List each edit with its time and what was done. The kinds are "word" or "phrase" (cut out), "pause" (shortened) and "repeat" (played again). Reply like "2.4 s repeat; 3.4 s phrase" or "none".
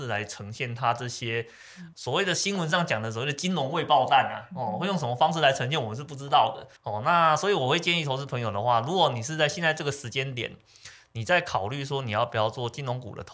1.9 s word; 6.8 s pause